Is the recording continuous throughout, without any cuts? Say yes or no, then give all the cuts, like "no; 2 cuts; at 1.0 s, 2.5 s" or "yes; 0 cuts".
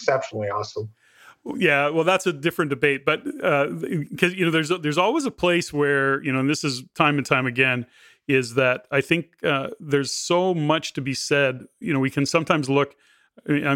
yes; 0 cuts